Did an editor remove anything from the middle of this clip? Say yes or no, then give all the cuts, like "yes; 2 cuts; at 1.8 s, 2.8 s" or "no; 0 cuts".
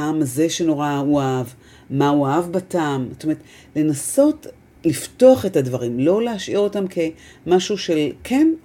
no; 0 cuts